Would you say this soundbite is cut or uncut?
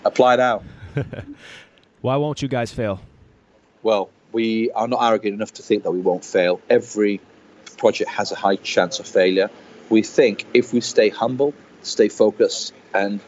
uncut